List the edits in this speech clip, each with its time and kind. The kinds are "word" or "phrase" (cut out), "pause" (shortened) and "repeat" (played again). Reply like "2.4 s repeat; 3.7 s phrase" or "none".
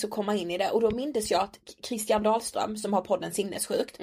none